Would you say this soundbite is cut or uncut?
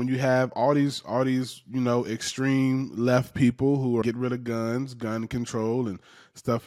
cut